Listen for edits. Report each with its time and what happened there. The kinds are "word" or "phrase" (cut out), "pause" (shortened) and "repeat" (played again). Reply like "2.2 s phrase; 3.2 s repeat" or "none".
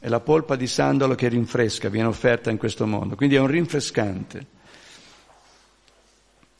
none